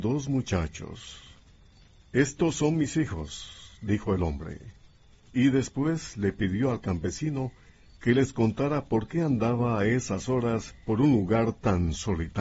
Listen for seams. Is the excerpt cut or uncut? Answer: uncut